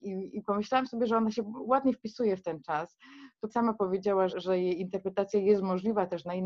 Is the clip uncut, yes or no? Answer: no